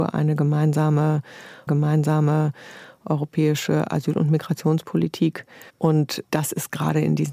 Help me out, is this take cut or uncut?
cut